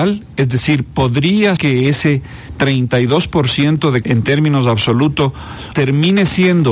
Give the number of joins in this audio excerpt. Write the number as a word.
three